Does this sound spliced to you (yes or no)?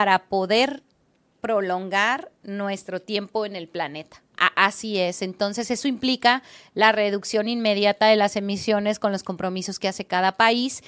no